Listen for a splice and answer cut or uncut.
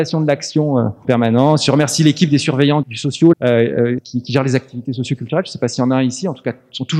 cut